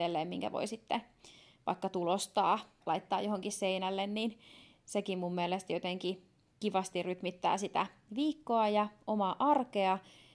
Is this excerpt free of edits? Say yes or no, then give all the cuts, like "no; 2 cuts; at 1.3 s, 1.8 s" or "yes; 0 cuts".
no; 1 cut; at 2.8 s